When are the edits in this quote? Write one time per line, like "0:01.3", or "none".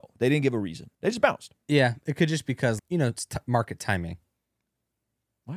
0:00.9
0:02.8